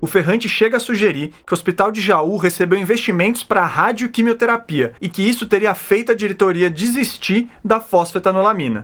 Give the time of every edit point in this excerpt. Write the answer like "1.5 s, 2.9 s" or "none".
5.0 s